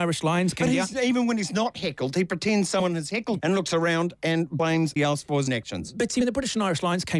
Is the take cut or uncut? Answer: cut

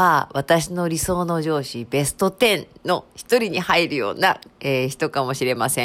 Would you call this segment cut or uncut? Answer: cut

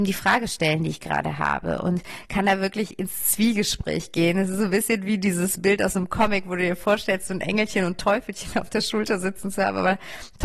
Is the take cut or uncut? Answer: uncut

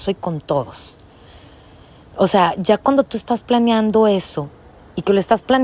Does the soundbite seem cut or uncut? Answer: uncut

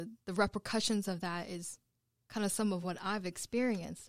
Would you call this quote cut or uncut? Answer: uncut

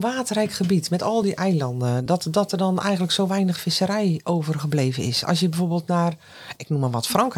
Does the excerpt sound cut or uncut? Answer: uncut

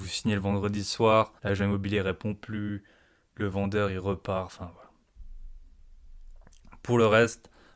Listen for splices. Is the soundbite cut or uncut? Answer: cut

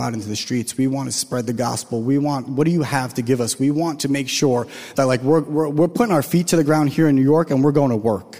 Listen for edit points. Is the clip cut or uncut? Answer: uncut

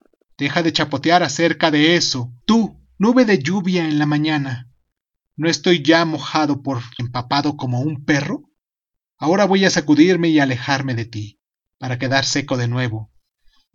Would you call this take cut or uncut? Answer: cut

